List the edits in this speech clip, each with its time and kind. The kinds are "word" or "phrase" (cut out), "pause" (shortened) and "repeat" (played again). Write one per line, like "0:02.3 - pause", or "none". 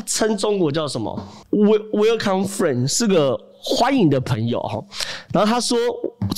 none